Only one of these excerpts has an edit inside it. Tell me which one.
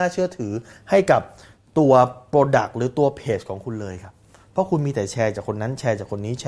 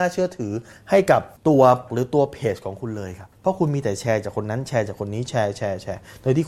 second; 3 cuts; at 1.4 s, 1.9 s, 3.3 s

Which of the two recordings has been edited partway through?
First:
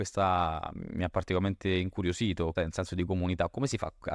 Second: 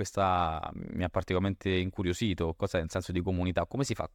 first; 1 cut; at 2.6 s

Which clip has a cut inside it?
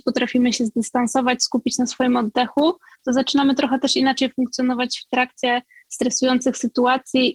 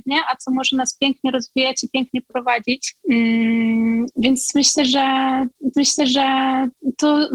second; 1 cut; at 5.7 s

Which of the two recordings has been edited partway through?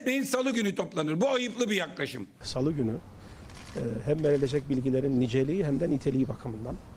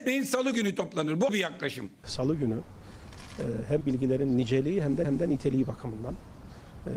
second; 3 cuts; at 1.3 s, 3.8 s, 5.0 s

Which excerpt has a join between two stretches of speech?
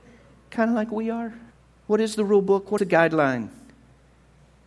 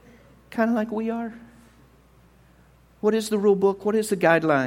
first; 2 cuts; at 1.5 s, 2.8 s

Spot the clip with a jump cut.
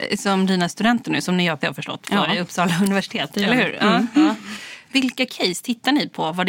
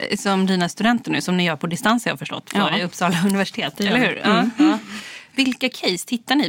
first; 1 cut; at 1.6 s

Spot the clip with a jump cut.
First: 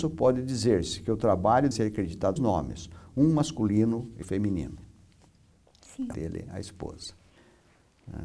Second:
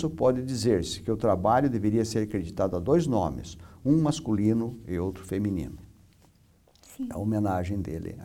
first; 4 cuts; at 1.7 s, 2.4 s, 4.2 s, 6.1 s

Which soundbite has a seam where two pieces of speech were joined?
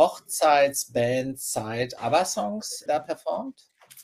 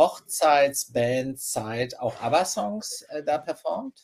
first; 2 cuts; at 2.0 s, 2.9 s

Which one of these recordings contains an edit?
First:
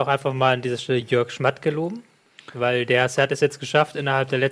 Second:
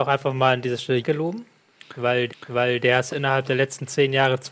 second; 3 cuts; at 1.0 s, 2.3 s, 3.1 s

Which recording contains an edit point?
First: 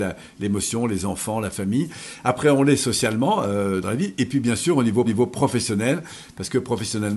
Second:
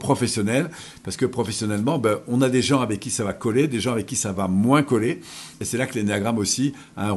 first; 2 cuts; at 3.8 s, 5.1 s

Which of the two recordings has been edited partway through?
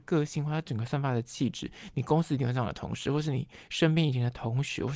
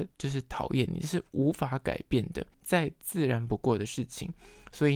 second; 1 cut; at 2.5 s

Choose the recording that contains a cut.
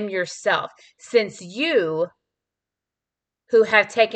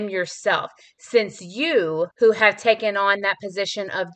second; 1 cut; at 2.1 s

